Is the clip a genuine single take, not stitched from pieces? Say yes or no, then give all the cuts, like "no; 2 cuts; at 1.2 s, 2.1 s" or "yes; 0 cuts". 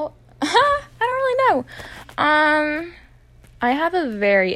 yes; 0 cuts